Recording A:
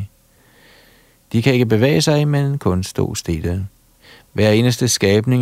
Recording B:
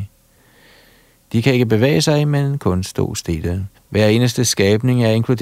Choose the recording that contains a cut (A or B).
B